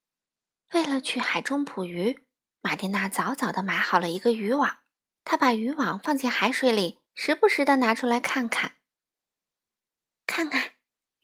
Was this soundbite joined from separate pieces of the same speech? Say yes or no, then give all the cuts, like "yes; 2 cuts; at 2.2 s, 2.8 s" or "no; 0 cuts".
yes; 2 cuts; at 5.1 s, 7.1 s